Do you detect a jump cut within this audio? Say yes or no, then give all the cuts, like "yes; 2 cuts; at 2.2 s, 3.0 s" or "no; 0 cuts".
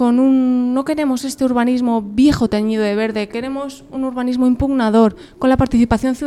no; 0 cuts